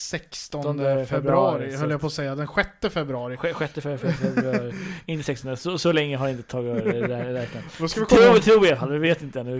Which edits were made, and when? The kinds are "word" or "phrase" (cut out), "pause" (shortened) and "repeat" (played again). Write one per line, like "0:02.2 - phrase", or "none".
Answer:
none